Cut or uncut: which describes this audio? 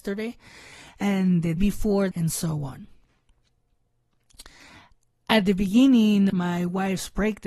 cut